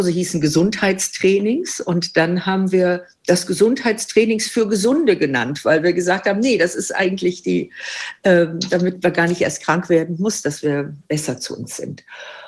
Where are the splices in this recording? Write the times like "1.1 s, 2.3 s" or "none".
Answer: 11.0 s

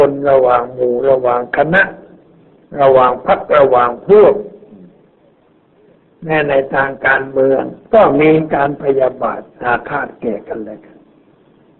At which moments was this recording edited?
7.8 s

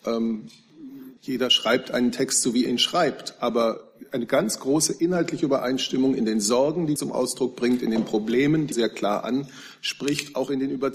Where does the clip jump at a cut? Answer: 1.2 s, 2.7 s, 7.0 s, 8.7 s

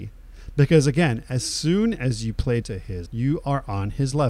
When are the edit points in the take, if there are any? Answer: 2.6 s, 3.1 s

